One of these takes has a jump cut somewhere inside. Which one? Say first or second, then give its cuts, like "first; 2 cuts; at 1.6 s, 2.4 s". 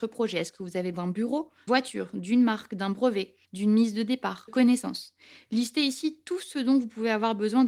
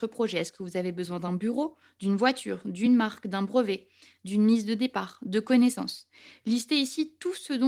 first; 4 cuts; at 0.9 s, 1.7 s, 3.4 s, 4.5 s